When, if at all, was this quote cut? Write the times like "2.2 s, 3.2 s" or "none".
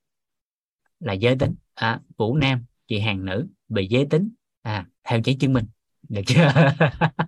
1.6 s, 2.7 s, 5.0 s, 5.9 s